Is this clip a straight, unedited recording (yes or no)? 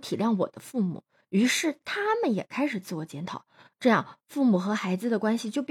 yes